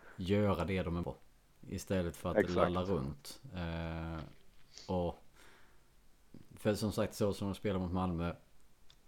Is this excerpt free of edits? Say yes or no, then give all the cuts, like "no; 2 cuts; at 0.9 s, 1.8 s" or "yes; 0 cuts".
no; 1 cut; at 1.0 s